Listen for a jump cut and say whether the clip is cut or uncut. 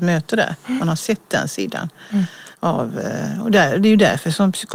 cut